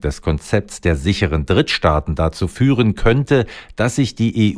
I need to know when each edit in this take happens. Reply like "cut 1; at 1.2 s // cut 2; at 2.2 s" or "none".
none

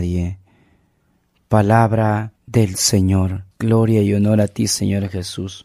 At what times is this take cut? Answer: cut 1; at 2.4 s // cut 2; at 3.5 s

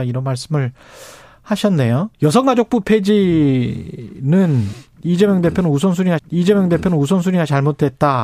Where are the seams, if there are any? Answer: cut 1; at 2.1 s // cut 2; at 6.2 s

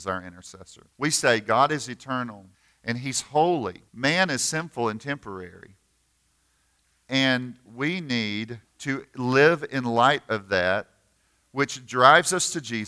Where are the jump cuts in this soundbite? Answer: cut 1; at 0.9 s // cut 2; at 2.5 s // cut 3; at 3.9 s // cut 4; at 8.6 s

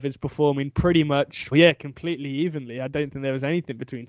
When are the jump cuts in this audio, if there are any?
cut 1; at 1.5 s

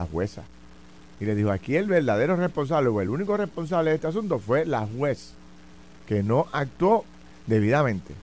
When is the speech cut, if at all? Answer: none

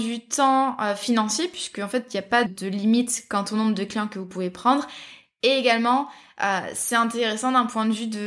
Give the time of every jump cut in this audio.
cut 1; at 2.5 s

